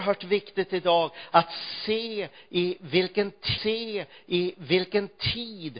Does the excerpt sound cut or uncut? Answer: cut